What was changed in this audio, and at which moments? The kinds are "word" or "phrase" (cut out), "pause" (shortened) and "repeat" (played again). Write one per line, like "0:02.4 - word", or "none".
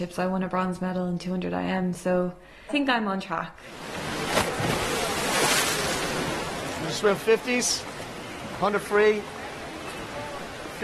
0:02.7 - word
0:07.2 - word